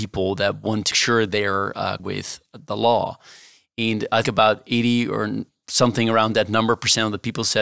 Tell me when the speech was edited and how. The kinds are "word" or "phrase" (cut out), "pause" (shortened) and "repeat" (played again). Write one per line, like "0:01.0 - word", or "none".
0:00.9 - word
0:02.0 - word
0:04.2 - word

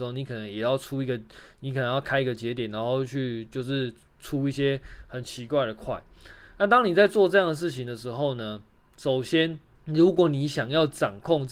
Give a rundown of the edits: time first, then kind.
0:09.7 - pause

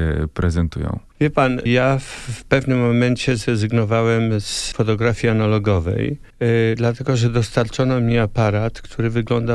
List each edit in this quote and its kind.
0:06.3 - pause

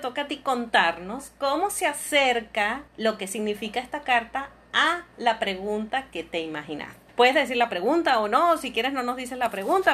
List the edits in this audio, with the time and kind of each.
0:02.9 - pause
0:07.1 - pause

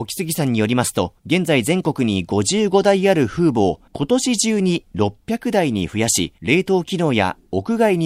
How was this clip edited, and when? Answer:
0:01.2 - pause
0:03.9 - pause
0:06.4 - pause

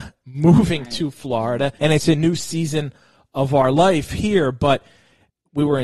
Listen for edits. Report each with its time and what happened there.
0:01.8 - pause

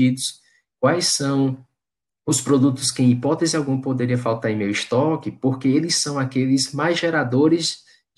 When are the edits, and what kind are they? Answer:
none

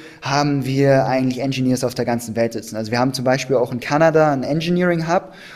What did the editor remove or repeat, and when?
none

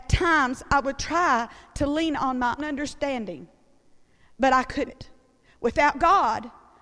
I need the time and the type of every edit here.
0:02.6 - word
0:04.9 - word

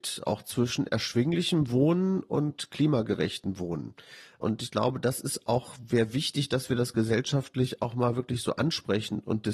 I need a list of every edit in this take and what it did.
none

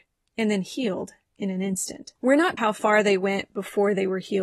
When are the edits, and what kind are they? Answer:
0:02.2 - pause
0:02.6 - word

